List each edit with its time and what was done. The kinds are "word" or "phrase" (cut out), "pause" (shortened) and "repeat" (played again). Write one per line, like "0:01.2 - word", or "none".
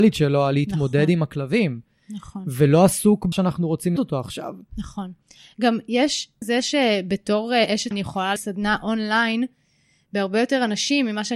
0:03.3 - word
0:04.0 - word
0:06.4 - word
0:07.9 - word
0:08.4 - word